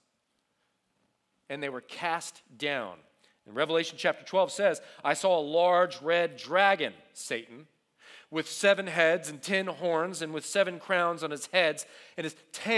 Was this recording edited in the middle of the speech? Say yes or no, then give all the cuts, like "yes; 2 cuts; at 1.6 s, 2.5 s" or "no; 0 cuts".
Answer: no; 0 cuts